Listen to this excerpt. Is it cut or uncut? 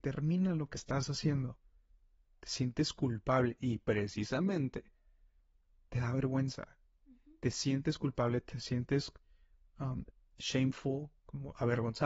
uncut